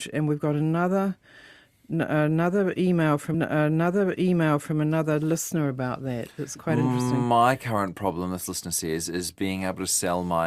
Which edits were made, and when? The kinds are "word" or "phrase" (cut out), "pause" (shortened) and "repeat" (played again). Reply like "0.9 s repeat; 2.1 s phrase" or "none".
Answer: 3.3 s repeat